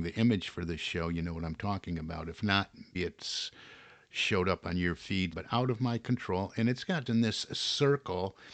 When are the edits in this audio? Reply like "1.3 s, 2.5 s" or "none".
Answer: 2.9 s, 5.3 s, 7.1 s